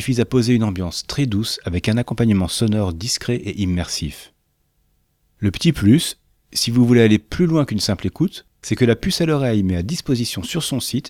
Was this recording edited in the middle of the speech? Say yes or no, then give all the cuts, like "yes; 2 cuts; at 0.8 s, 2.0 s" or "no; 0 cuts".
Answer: yes; 1 cut; at 8.5 s